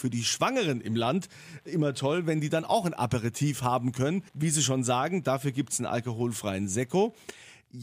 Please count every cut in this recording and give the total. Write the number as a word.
one